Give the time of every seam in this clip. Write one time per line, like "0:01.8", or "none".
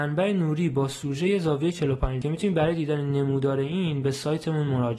0:02.2